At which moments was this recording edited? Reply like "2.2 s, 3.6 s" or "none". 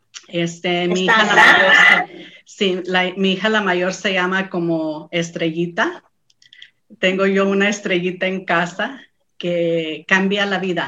none